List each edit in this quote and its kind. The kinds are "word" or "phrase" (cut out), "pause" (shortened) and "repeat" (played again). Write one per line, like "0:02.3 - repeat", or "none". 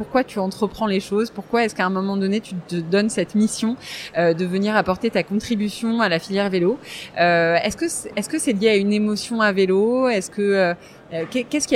none